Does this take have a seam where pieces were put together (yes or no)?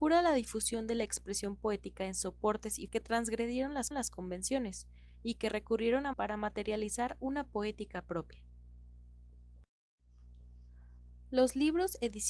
yes